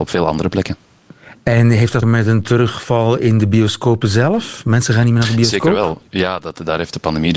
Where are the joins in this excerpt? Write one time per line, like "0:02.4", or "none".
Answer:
0:02.0
0:06.1

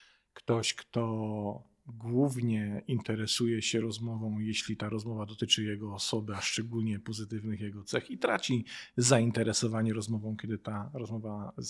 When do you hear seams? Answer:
none

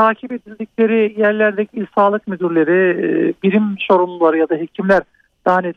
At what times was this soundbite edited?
none

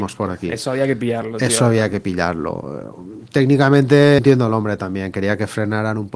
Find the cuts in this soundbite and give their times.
0:04.2

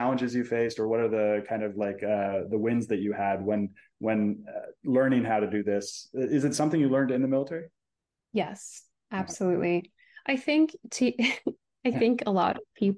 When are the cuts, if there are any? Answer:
0:08.0

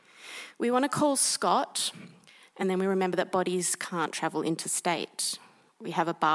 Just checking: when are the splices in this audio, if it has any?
none

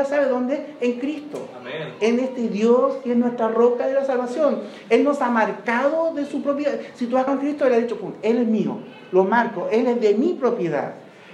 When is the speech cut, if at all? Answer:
0:07.3

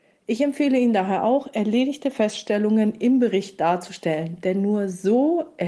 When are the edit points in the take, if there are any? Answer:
none

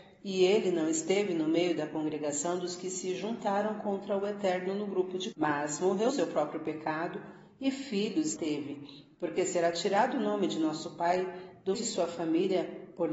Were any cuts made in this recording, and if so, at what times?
0:05.3
0:06.1
0:08.4
0:11.7

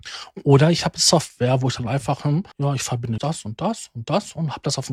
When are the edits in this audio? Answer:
0:02.5
0:03.2

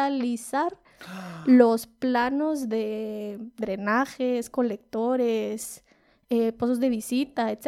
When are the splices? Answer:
none

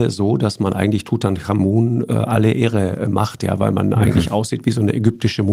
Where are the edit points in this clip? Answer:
none

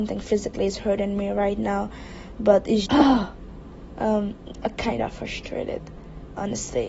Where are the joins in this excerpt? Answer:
0:02.9

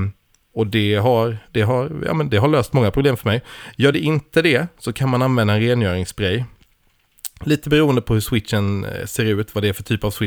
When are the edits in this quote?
none

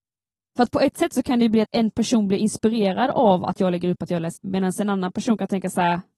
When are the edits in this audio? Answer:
0:01.6
0:04.4

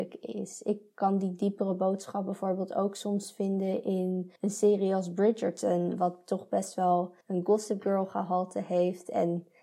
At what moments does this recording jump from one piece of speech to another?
0:04.4
0:07.2

